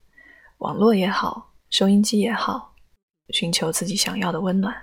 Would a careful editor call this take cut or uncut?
uncut